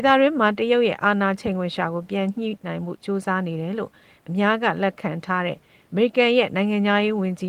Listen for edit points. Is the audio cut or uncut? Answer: uncut